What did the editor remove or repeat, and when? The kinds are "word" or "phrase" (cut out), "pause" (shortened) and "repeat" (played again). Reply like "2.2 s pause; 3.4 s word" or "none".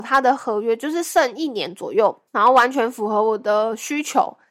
2.3 s pause